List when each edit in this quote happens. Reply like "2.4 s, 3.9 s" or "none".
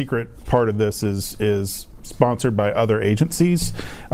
none